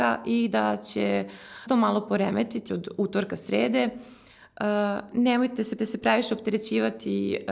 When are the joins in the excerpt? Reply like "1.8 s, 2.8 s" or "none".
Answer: 1.7 s, 2.7 s, 5.8 s